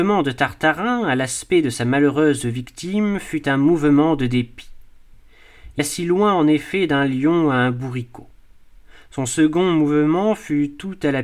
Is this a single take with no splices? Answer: no; 1 cut; at 5.8 s

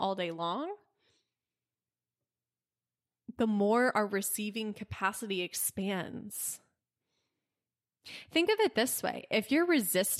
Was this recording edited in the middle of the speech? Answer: no; 0 cuts

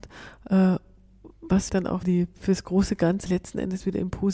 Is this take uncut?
no; 3 cuts; at 1.7 s, 2.0 s, 3.3 s

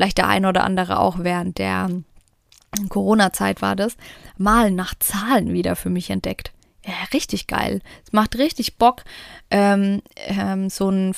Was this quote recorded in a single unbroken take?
yes; 0 cuts

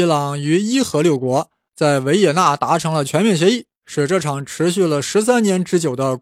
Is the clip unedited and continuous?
no; 1 cut; at 3.8 s

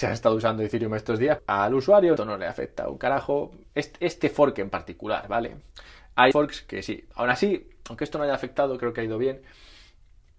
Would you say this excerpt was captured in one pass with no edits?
no; 3 cuts; at 1.4 s, 2.2 s, 6.3 s

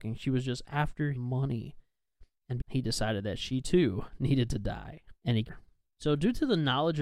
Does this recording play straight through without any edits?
no; 4 cuts; at 1.1 s, 2.6 s, 5.2 s, 5.5 s

